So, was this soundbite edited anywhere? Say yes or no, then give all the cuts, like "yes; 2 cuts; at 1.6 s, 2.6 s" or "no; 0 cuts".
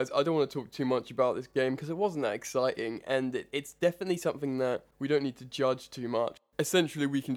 yes; 1 cut; at 4.9 s